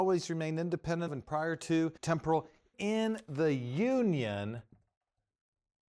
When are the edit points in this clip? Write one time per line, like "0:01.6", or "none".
0:01.1
0:02.0
0:02.7